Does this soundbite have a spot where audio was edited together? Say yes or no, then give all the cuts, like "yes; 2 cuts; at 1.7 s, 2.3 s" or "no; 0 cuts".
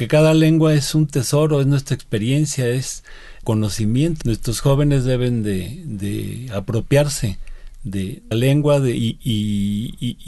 yes; 3 cuts; at 3.4 s, 4.2 s, 8.3 s